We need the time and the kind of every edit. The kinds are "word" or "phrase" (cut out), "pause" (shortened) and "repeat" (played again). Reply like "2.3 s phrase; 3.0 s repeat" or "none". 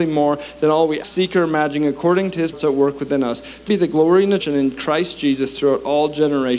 1.0 s word; 2.5 s word; 3.7 s word; 4.4 s word